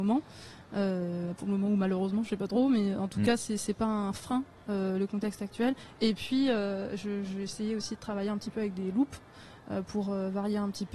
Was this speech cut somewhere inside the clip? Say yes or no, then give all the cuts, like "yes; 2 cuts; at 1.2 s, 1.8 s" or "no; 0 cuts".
no; 0 cuts